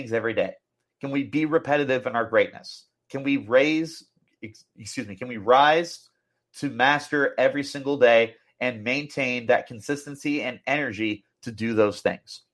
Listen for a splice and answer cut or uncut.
uncut